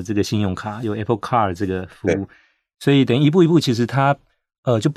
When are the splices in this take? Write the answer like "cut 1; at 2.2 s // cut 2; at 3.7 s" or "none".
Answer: none